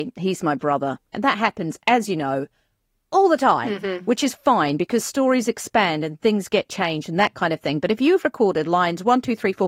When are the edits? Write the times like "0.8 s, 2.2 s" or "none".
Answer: none

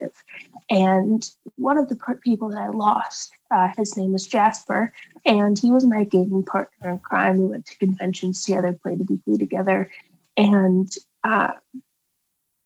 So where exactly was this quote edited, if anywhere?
none

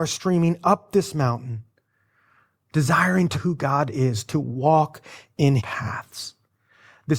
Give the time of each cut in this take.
3.3 s, 5.6 s

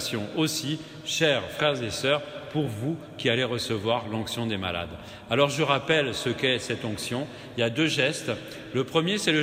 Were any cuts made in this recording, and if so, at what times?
none

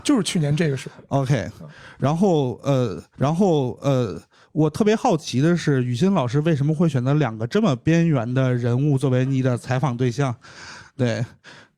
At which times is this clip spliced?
3.1 s

